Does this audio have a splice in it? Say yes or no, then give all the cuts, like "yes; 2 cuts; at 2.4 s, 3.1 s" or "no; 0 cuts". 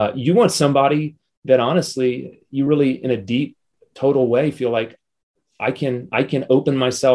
no; 0 cuts